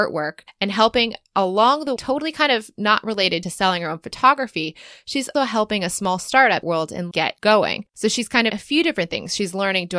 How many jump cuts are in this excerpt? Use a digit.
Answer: 8